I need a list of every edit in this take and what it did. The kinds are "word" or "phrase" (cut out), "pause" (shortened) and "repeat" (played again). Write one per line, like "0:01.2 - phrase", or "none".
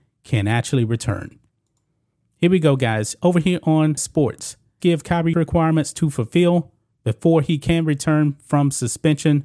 0:04.0 - word
0:04.8 - word
0:05.3 - phrase